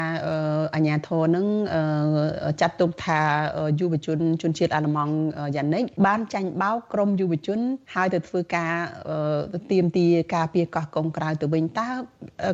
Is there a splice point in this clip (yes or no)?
yes